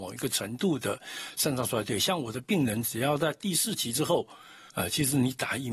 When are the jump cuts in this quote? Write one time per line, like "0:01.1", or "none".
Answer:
0:04.7